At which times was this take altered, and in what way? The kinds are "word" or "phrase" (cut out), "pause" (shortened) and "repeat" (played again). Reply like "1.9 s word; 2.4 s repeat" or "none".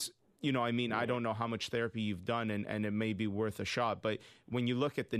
none